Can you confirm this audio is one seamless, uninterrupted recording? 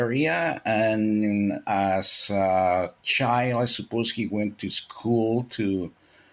yes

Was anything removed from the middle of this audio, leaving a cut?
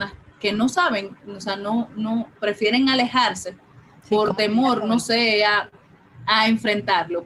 yes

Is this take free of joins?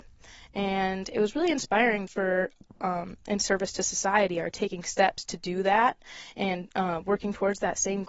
no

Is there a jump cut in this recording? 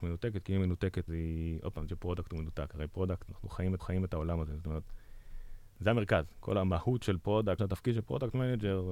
yes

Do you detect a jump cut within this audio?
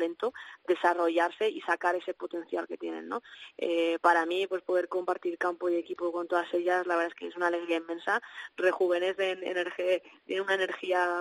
no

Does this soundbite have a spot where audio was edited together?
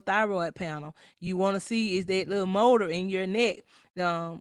no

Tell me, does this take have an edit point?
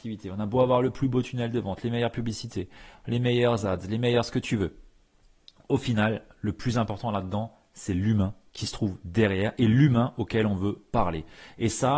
no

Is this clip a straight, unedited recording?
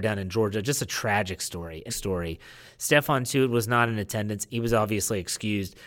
no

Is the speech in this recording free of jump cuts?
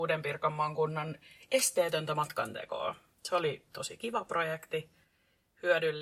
yes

